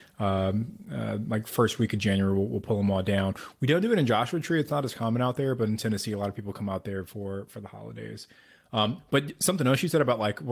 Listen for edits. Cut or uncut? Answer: uncut